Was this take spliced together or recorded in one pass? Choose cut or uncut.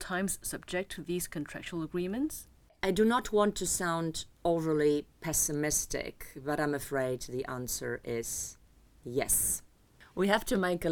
uncut